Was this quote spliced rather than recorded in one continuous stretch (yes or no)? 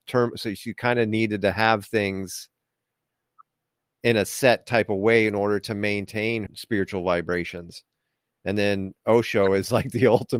yes